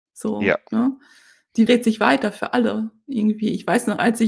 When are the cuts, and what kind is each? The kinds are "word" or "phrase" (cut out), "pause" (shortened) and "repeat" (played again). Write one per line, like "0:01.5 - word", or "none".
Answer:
0:01.7 - word